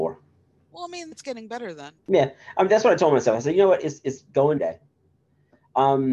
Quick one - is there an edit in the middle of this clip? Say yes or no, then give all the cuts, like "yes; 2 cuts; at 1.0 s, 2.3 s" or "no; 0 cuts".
yes; 3 cuts; at 1.1 s, 2.0 s, 4.6 s